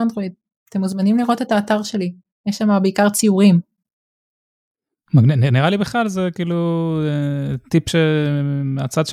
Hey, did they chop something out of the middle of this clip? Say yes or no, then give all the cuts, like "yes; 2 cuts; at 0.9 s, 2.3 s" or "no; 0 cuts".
no; 0 cuts